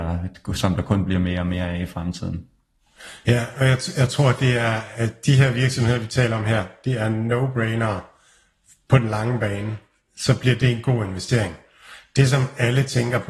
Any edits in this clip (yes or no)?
no